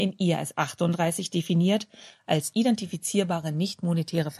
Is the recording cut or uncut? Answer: uncut